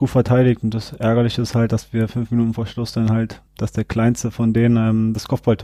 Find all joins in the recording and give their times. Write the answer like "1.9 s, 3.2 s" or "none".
3.5 s